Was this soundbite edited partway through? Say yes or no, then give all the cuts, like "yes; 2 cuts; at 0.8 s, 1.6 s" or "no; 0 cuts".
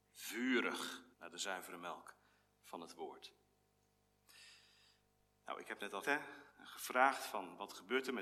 yes; 3 cuts; at 1.1 s, 6.0 s, 6.5 s